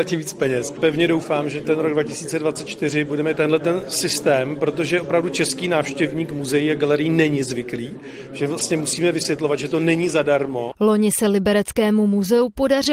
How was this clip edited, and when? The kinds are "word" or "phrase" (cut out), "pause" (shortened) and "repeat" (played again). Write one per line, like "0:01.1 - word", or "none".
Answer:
0:03.3 - phrase